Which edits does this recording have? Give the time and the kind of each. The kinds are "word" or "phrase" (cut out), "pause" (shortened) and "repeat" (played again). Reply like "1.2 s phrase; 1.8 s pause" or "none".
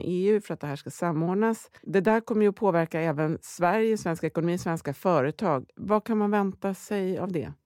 1.8 s pause